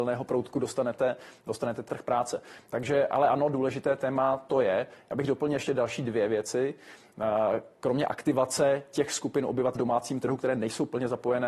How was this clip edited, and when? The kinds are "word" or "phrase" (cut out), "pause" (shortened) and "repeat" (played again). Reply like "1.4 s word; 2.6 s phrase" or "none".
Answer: 1.9 s phrase; 9.8 s word